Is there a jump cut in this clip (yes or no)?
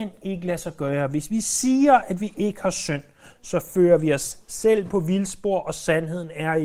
no